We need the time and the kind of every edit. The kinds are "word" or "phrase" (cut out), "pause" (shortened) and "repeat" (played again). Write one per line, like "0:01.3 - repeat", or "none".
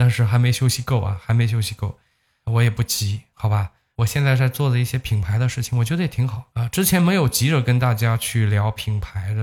none